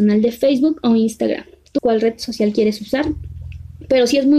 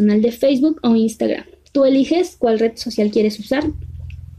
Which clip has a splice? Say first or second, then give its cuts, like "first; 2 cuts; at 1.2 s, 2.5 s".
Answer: first; 1 cut; at 1.8 s